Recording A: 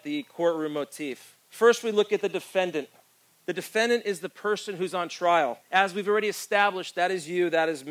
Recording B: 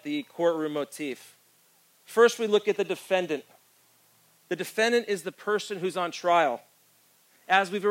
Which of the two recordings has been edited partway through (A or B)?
A